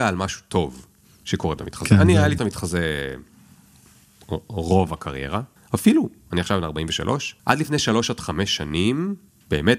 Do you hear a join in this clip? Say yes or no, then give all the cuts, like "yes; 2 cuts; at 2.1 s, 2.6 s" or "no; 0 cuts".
yes; 4 cuts; at 1.6 s, 2.4 s, 5.6 s, 7.4 s